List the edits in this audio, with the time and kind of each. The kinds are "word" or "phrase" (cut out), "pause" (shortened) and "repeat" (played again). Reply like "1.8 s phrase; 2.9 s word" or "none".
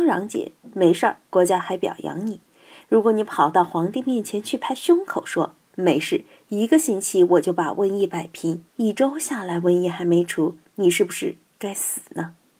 1.2 s pause; 8.7 s pause